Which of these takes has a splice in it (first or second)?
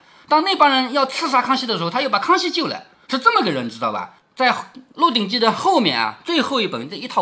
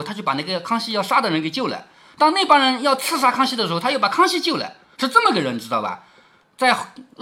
first